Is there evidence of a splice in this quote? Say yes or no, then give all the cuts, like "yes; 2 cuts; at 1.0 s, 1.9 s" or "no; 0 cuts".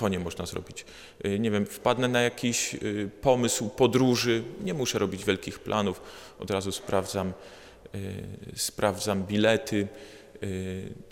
yes; 1 cut; at 4.6 s